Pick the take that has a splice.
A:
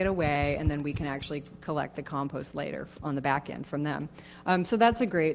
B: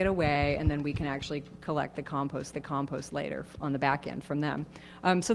B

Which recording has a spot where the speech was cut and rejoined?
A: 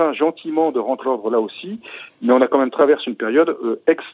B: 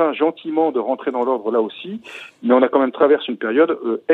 A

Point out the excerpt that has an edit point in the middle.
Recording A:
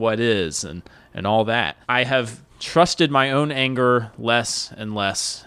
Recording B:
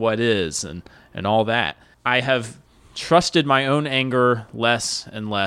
A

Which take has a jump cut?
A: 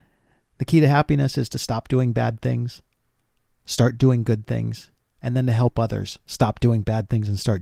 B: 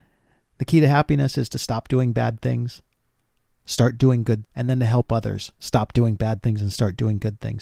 B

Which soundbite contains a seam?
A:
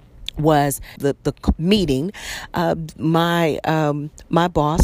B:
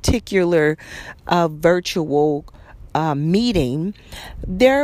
A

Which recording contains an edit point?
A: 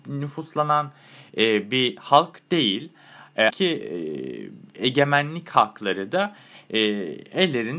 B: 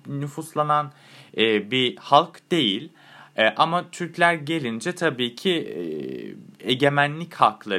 A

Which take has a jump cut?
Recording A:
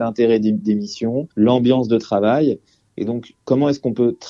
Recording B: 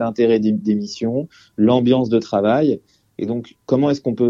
A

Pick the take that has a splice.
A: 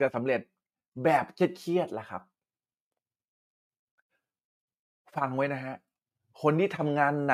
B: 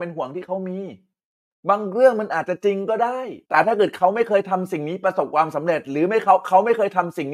B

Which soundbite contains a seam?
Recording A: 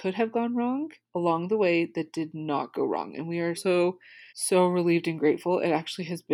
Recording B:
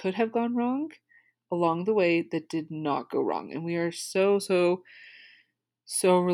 A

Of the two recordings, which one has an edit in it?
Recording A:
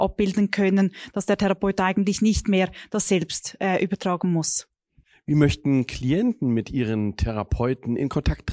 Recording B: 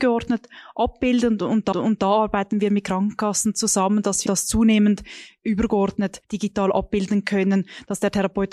B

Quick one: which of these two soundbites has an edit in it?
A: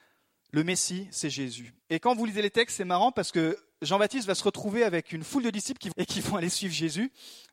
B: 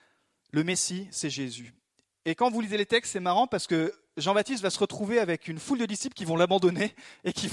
A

